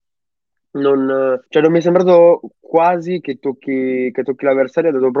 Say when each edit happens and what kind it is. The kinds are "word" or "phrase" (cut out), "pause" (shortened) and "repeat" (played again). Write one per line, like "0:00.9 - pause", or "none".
0:01.5 - pause